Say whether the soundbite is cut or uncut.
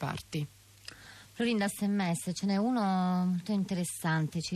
cut